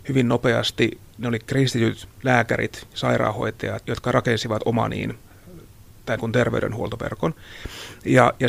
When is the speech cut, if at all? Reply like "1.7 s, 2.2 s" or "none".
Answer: 1.1 s, 3.8 s, 6.2 s